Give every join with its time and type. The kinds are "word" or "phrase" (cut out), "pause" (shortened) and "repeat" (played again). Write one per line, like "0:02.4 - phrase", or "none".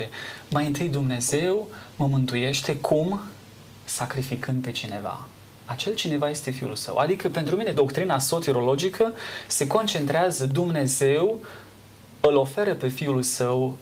0:07.7 - word